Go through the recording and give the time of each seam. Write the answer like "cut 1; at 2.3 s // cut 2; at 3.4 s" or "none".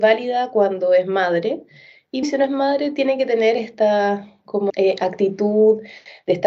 cut 1; at 2.2 s // cut 2; at 4.7 s